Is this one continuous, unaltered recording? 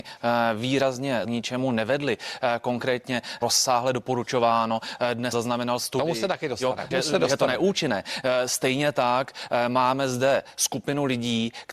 no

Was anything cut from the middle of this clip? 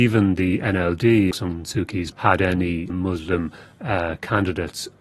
yes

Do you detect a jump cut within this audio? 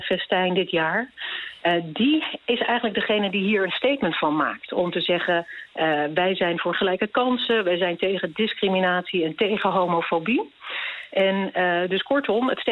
no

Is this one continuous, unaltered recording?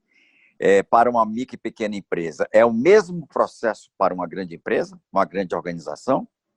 yes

